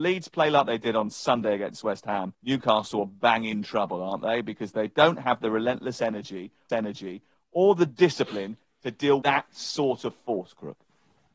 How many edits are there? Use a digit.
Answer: 3